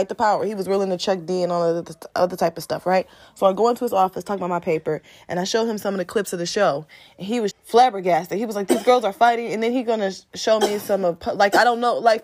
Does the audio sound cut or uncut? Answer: cut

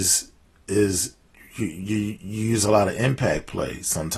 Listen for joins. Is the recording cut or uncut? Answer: uncut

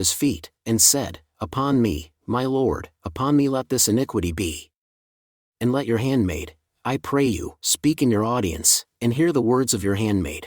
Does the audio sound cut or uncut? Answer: uncut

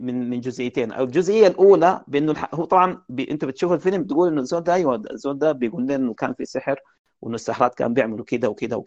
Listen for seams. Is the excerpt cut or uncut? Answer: uncut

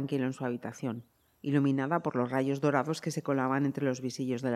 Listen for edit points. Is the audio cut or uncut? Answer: uncut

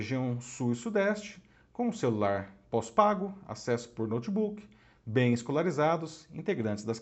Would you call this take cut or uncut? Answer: uncut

